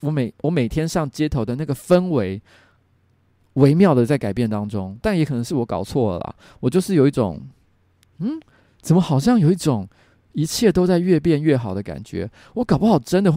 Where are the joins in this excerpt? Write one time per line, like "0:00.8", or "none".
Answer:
none